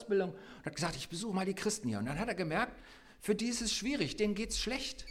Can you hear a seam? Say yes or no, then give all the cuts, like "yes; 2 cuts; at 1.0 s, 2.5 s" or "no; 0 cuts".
no; 0 cuts